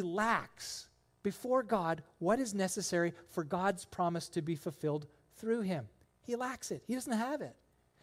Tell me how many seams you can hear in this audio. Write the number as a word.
zero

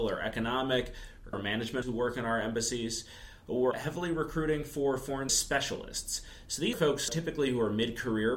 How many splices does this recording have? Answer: six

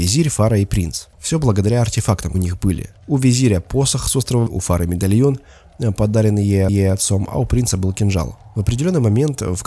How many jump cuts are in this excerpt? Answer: five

